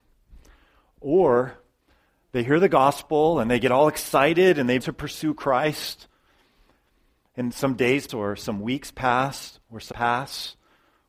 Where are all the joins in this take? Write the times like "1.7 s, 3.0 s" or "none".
4.8 s, 7.5 s, 8.1 s, 9.9 s